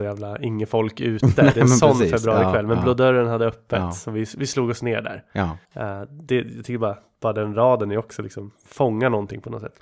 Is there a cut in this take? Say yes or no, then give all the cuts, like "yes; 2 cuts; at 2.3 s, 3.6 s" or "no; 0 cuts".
yes; 1 cut; at 5.6 s